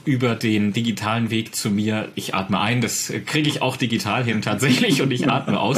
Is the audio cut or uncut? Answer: uncut